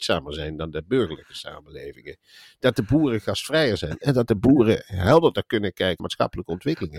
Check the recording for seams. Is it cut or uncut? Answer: cut